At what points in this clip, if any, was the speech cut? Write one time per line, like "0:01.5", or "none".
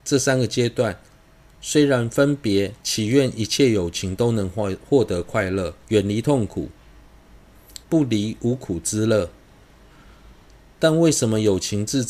0:02.8
0:05.8
0:07.8